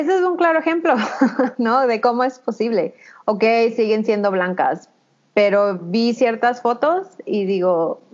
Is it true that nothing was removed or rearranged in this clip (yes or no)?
yes